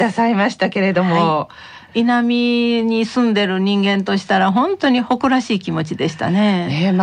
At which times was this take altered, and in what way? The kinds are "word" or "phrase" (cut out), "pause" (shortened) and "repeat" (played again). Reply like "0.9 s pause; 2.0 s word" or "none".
none